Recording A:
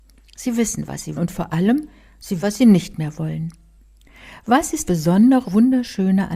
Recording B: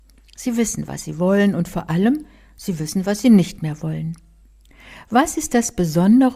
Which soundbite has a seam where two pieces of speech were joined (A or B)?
A